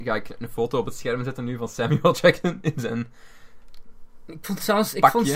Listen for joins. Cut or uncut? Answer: uncut